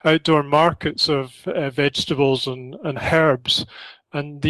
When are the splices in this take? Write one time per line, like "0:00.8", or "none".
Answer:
none